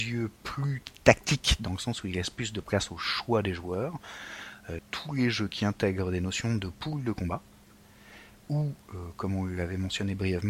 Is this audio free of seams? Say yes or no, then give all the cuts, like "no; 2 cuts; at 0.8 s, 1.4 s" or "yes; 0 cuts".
no; 1 cut; at 4.8 s